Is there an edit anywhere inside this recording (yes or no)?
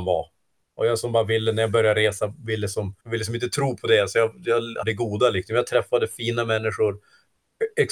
yes